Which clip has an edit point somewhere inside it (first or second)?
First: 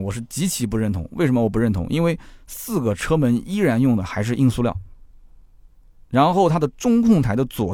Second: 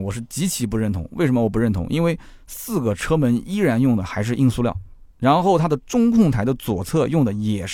second